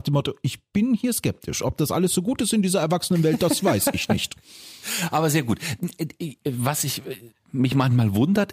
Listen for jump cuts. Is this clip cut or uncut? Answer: uncut